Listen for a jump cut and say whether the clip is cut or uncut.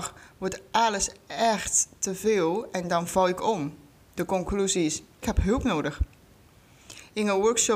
cut